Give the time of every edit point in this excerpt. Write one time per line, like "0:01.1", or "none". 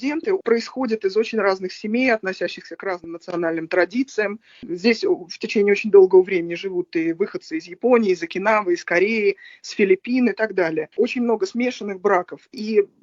0:10.9